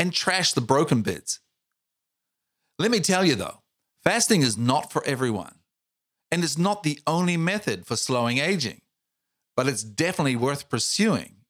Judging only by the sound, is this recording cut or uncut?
uncut